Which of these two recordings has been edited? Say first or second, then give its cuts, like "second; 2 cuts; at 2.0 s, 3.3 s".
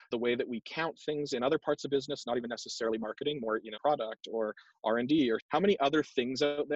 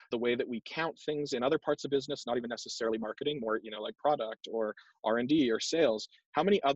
first; 2 cuts; at 3.8 s, 5.4 s